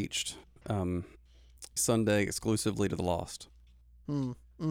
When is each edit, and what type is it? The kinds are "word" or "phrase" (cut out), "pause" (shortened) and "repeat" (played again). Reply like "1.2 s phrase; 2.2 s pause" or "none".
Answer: 1.8 s word